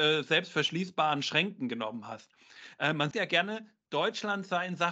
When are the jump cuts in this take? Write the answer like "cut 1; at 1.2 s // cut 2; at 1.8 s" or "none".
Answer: cut 1; at 3.1 s